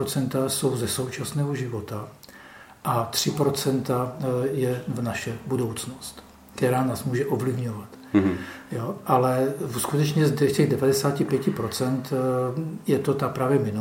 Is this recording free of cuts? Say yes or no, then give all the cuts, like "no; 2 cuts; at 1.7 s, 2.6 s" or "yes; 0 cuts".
yes; 0 cuts